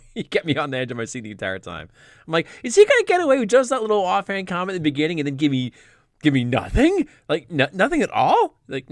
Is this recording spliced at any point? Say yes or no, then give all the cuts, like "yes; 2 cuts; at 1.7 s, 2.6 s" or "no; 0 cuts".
no; 0 cuts